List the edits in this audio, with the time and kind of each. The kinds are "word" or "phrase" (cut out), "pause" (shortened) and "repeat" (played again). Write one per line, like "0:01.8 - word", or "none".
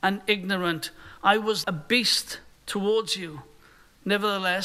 0:01.6 - word
0:02.5 - pause